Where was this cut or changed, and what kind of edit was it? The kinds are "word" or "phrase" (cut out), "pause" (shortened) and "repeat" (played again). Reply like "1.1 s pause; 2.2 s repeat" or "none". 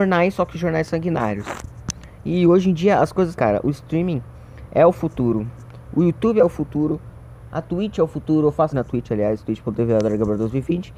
3.3 s phrase; 8.7 s word